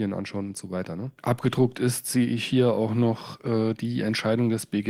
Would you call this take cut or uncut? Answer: cut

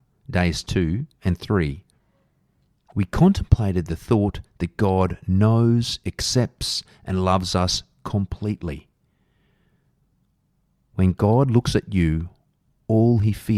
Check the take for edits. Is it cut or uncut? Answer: uncut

